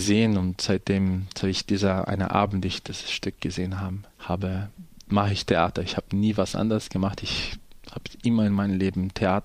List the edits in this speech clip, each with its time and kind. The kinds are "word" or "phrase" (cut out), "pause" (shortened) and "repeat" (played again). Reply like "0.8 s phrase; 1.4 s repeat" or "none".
4.1 s pause